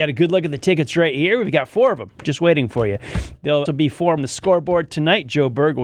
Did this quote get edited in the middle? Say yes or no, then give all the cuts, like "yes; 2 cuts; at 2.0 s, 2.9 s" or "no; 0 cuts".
yes; 2 cuts; at 3.7 s, 4.2 s